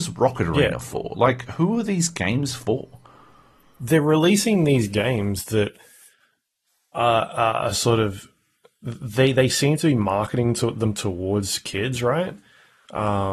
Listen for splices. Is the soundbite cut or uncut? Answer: uncut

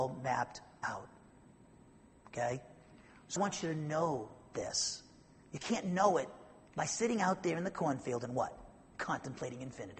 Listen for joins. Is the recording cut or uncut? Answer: cut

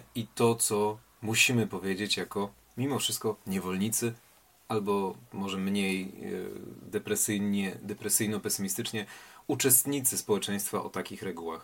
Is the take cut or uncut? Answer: uncut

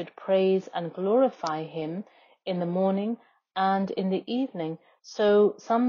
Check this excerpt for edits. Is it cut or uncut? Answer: uncut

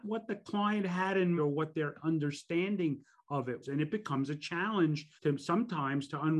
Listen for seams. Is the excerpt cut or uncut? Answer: cut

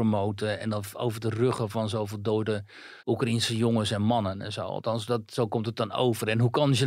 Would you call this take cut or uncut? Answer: cut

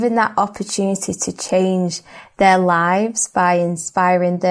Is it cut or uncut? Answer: uncut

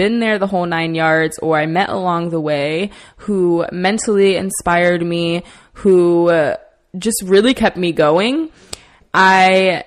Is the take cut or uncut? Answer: uncut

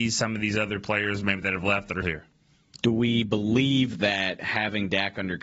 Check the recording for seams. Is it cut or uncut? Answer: cut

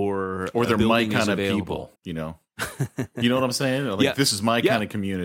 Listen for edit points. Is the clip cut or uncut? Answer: cut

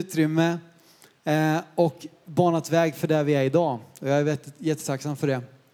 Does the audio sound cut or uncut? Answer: uncut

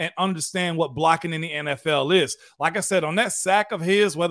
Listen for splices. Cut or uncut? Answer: uncut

